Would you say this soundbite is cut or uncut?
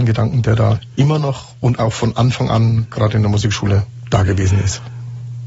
uncut